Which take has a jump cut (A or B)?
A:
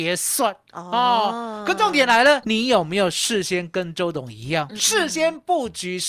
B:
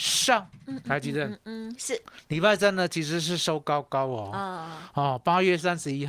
A